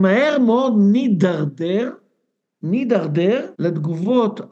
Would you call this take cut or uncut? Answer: cut